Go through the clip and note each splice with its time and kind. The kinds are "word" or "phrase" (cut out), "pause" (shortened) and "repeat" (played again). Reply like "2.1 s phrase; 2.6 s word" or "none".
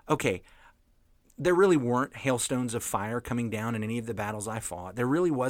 none